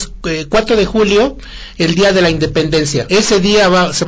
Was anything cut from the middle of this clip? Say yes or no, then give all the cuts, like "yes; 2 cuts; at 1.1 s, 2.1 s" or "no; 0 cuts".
no; 0 cuts